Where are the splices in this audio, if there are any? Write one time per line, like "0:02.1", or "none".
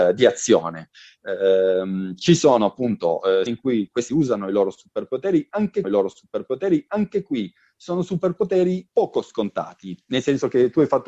0:03.5
0:04.1
0:05.8
0:08.9